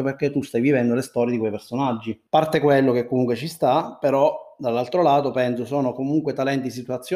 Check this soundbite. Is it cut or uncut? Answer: cut